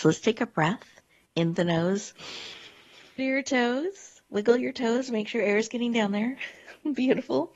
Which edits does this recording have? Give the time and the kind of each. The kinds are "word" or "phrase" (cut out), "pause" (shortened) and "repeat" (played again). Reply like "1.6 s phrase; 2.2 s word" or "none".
1.6 s word; 3.2 s phrase; 4.3 s pause